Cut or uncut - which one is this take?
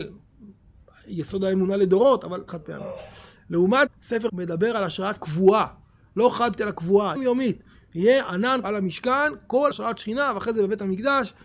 cut